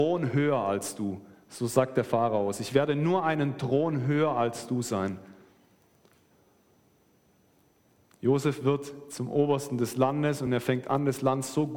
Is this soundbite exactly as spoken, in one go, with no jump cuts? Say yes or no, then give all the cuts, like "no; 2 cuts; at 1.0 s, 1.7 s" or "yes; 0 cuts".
yes; 0 cuts